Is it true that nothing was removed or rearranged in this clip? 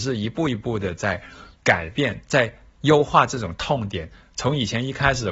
no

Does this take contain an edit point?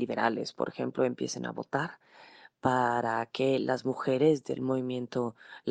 no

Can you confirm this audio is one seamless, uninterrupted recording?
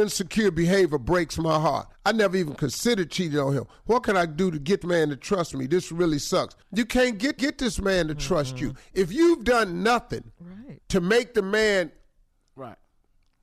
no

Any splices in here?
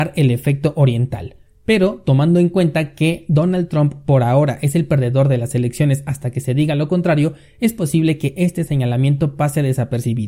no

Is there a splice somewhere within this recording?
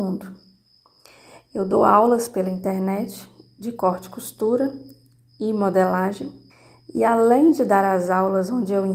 yes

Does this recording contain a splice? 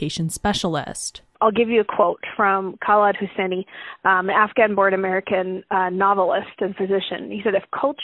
no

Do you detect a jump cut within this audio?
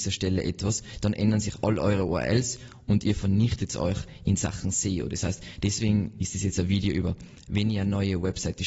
no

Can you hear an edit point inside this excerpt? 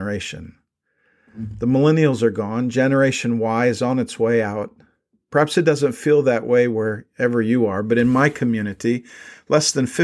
no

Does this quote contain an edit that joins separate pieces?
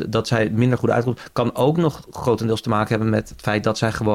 no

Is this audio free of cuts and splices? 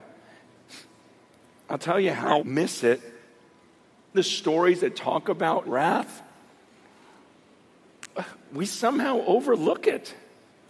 no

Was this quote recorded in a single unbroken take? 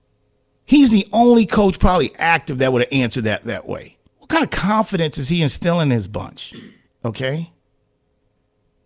no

